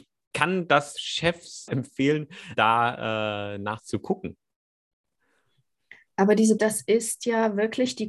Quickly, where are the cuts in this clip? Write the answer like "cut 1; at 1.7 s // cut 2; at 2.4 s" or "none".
cut 1; at 1.7 s // cut 2; at 2.5 s // cut 3; at 6.6 s

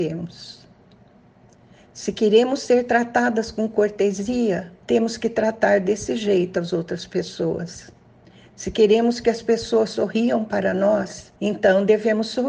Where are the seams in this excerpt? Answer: cut 1; at 4.8 s // cut 2; at 8.1 s // cut 3; at 11.4 s

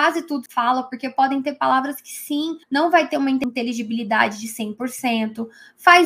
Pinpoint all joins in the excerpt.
cut 1; at 2.6 s

